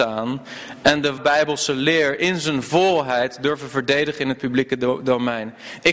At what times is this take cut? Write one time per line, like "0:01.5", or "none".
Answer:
0:01.2